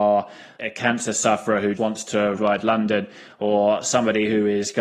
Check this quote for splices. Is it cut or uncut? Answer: cut